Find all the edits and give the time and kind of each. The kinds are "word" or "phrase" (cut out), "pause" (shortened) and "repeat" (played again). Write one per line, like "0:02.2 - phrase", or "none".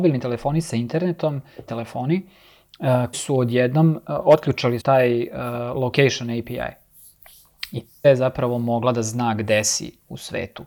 0:01.7 - word
0:03.1 - word
0:04.8 - word
0:08.0 - word